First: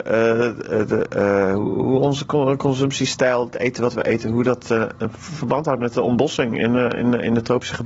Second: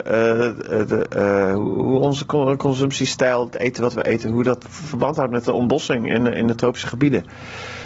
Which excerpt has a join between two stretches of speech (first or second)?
second